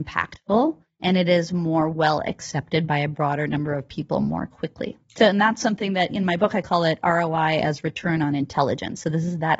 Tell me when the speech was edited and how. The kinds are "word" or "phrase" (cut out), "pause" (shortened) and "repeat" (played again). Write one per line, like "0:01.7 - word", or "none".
0:05.0 - pause